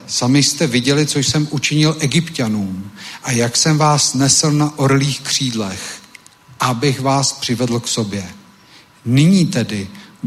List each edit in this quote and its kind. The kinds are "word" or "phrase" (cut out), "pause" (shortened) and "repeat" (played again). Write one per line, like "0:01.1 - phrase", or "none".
none